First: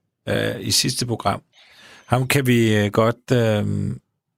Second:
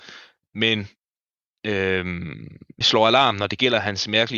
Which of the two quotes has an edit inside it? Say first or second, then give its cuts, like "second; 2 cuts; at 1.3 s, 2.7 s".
second; 1 cut; at 2.8 s